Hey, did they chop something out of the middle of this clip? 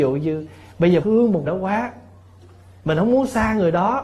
yes; 2 cuts; at 1.0 s, 1.5 s

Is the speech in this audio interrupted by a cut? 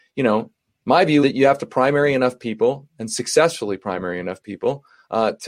yes; 1 cut; at 1.2 s

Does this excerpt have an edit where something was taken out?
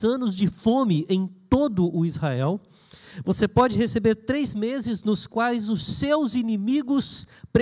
no; 0 cuts

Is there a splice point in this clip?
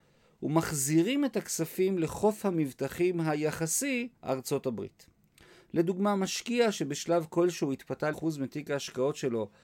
yes; 2 cuts; at 4.2 s, 8.1 s

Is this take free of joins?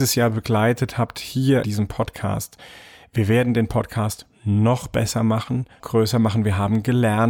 no; 2 cuts; at 1.6 s, 5.8 s

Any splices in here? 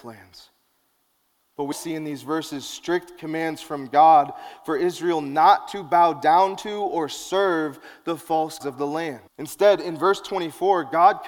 yes; 3 cuts; at 1.7 s, 8.6 s, 9.3 s

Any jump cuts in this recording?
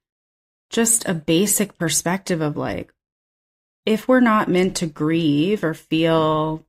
no; 0 cuts

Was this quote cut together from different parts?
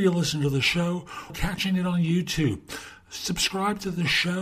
yes; 1 cut; at 1.3 s

